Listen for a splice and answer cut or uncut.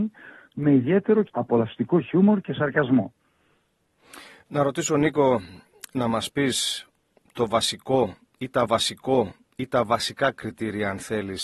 cut